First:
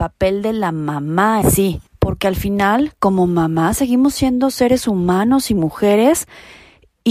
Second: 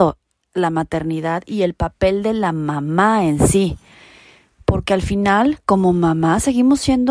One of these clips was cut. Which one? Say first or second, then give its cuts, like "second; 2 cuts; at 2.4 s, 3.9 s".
first; 2 cuts; at 1.4 s, 1.9 s